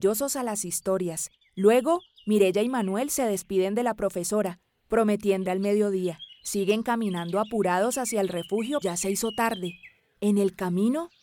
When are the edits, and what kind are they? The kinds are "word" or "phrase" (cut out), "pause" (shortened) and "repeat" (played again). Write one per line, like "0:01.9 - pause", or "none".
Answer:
0:01.4 - pause
0:05.5 - word
0:06.4 - pause
0:08.8 - word